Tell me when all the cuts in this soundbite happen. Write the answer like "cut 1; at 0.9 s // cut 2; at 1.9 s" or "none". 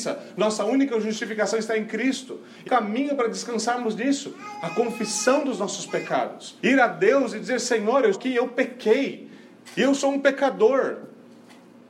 cut 1; at 2.6 s // cut 2; at 6.6 s // cut 3; at 8.1 s